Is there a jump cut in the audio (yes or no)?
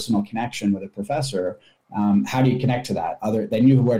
no